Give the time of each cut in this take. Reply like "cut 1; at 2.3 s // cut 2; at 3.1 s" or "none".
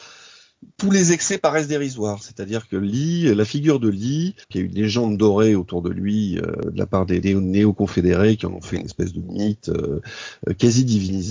cut 1; at 4.4 s